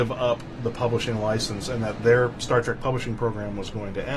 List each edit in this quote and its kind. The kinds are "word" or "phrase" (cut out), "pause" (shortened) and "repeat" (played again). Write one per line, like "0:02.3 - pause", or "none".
none